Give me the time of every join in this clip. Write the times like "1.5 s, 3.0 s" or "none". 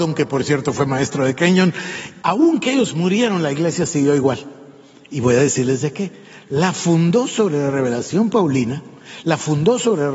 none